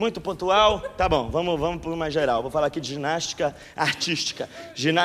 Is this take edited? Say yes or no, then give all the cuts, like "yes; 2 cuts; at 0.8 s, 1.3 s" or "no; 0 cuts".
no; 0 cuts